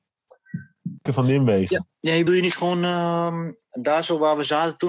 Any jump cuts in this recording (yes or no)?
yes